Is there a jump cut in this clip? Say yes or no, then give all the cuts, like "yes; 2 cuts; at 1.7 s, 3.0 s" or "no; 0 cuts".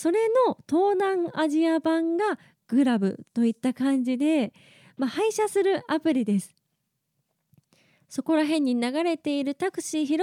no; 0 cuts